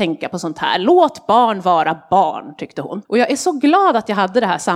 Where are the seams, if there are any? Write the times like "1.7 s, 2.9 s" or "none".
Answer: 3.0 s